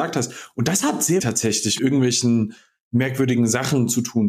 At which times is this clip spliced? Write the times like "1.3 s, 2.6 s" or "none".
1.2 s, 1.8 s